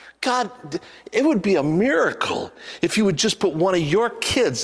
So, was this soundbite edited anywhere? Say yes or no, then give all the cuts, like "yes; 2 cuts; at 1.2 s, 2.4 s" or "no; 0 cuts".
no; 0 cuts